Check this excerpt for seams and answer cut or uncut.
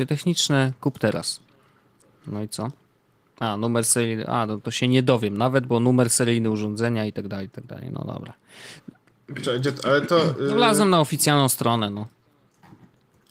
uncut